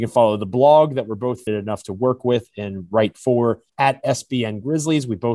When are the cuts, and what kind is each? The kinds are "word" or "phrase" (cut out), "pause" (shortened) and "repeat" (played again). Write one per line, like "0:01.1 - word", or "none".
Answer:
0:01.5 - word
0:03.7 - pause

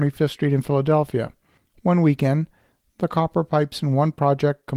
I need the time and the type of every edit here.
none

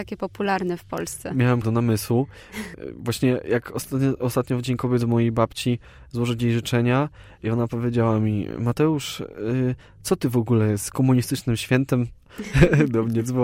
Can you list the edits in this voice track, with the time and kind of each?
0:01.6 - word
0:05.0 - word

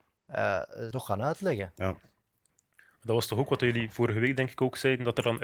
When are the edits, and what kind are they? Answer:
0:00.9 - phrase

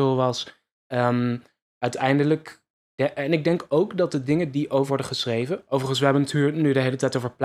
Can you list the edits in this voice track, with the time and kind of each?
0:04.9 - word

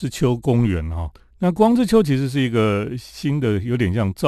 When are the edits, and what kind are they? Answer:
0:01.2 - pause

